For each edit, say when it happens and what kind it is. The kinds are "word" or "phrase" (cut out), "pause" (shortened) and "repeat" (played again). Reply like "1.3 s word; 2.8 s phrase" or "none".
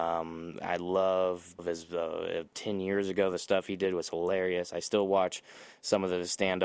1.6 s phrase; 2.5 s word